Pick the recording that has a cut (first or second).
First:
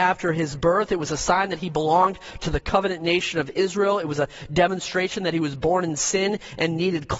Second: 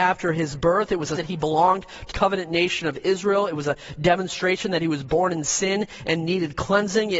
second